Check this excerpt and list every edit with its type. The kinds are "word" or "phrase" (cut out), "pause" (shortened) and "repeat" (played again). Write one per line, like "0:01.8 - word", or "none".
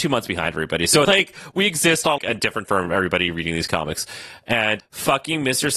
0:01.0 - phrase
0:02.2 - word
0:02.6 - word
0:04.8 - word